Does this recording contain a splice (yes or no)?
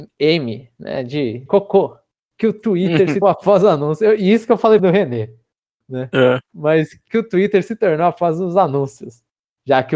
yes